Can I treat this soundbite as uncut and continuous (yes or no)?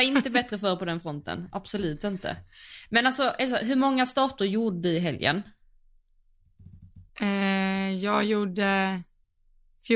no